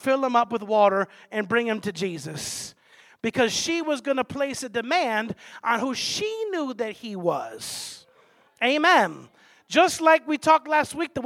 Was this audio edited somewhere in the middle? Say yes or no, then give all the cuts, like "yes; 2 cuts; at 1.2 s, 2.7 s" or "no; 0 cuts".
no; 0 cuts